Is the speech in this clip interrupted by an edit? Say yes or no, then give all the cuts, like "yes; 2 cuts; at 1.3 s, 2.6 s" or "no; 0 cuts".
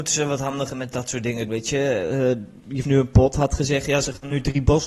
yes; 2 cuts; at 1.5 s, 2.8 s